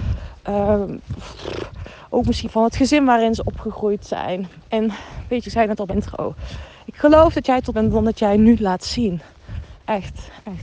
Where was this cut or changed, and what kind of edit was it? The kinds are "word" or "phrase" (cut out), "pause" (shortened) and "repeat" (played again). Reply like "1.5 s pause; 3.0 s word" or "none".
2.4 s word; 4.6 s pause; 5.4 s word; 5.9 s word; 7.7 s phrase